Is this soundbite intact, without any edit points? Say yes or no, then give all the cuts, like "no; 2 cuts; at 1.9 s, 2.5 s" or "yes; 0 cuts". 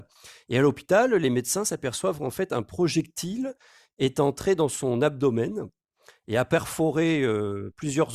yes; 0 cuts